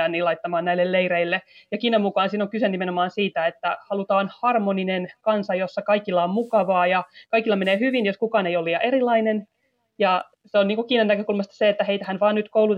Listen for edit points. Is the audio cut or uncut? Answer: cut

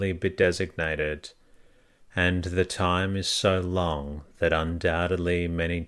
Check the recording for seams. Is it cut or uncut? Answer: uncut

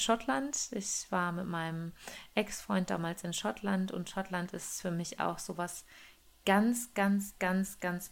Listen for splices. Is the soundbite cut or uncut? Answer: uncut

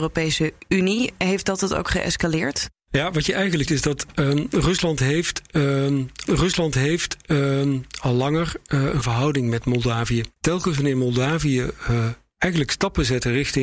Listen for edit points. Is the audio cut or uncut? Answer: cut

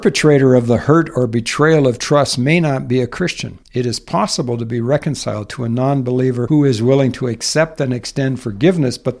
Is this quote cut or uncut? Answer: cut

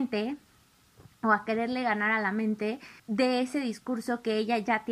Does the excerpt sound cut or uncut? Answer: cut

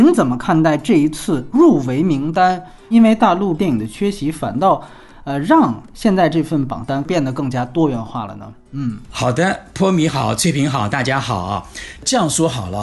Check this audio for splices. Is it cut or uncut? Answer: uncut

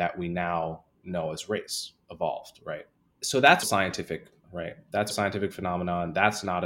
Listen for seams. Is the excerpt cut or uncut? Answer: cut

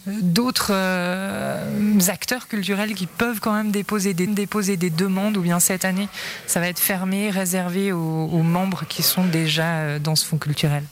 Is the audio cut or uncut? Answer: cut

